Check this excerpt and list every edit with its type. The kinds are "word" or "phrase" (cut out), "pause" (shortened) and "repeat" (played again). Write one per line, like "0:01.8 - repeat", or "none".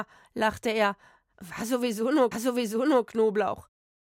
0:02.3 - repeat